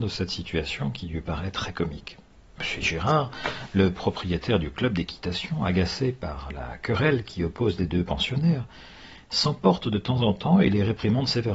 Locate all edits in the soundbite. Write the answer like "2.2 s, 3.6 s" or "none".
none